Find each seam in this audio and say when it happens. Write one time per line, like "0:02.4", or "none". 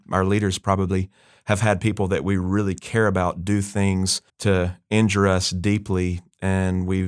0:04.3

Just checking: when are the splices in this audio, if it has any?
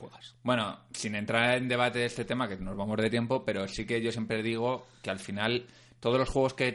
none

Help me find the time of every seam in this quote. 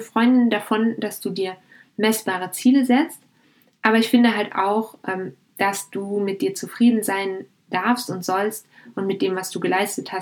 none

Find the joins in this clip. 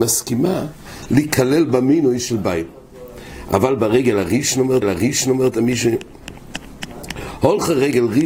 0:04.8

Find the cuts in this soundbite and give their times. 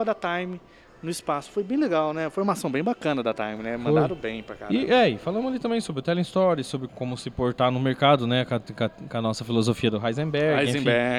0:06.9

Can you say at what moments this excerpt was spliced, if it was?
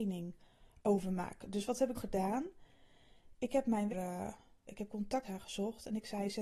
0:01.9
0:03.9
0:04.7
0:05.2

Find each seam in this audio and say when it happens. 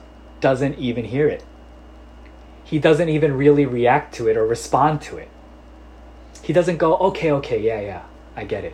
none

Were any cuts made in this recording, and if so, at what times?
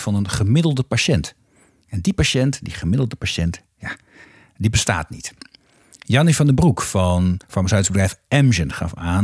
0:07.4

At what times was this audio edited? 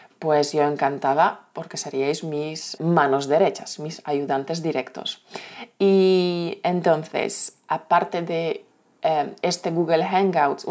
0:02.8

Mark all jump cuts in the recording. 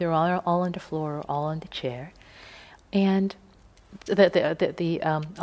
0:04.1

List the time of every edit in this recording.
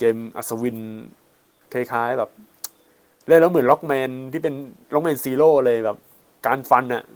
none

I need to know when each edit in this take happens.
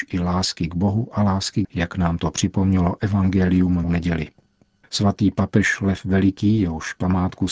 0:01.6
0:03.8

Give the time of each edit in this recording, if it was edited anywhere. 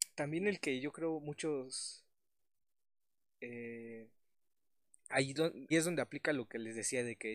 0:05.7

